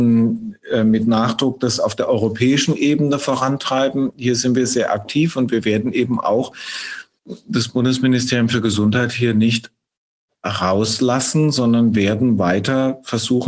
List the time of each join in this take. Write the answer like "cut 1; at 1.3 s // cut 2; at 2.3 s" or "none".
none